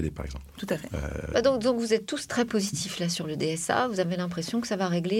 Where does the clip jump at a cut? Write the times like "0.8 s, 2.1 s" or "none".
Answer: none